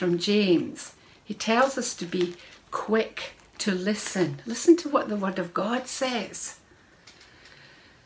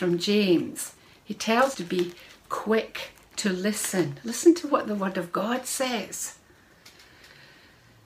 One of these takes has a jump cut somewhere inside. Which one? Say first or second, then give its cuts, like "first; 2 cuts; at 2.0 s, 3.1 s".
second; 1 cut; at 1.7 s